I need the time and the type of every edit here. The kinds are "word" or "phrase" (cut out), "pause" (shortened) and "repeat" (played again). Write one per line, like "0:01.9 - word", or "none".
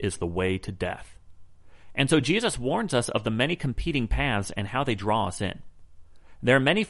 none